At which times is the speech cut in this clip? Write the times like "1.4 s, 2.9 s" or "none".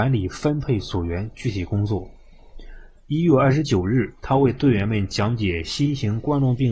4.2 s

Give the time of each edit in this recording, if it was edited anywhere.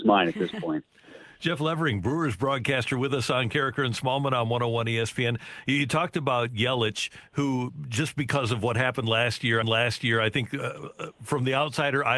9.6 s

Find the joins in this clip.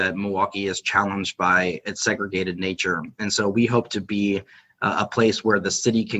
none

